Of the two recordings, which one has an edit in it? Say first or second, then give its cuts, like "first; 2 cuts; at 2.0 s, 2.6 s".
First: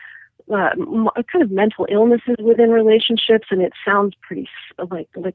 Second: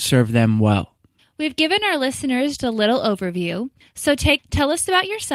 second; 3 cuts; at 1.2 s, 2.6 s, 4.4 s